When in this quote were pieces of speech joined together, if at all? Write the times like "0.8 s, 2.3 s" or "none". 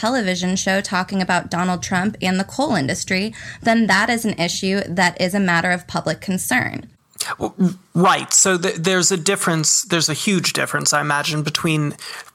none